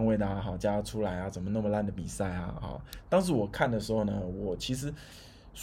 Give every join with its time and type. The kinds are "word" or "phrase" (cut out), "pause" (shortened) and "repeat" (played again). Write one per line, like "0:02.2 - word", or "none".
none